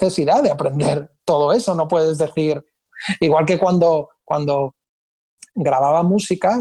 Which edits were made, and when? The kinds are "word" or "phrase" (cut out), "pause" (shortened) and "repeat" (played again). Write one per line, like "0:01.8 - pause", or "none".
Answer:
none